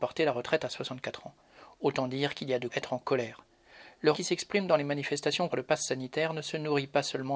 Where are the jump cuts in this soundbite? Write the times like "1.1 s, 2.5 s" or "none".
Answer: 2.7 s, 4.1 s, 5.5 s